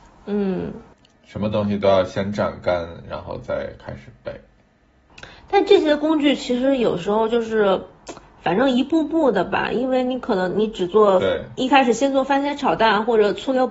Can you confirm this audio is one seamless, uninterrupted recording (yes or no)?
yes